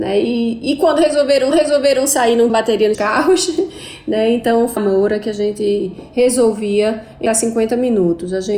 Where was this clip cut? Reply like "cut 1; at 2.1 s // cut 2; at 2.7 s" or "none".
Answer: cut 1; at 1.5 s // cut 2; at 2.5 s // cut 3; at 2.9 s // cut 4; at 4.8 s // cut 5; at 7.3 s